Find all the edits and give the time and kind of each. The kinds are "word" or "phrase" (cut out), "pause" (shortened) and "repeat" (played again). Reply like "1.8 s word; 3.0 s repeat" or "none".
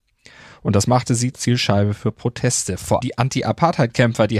1.3 s word; 3.0 s word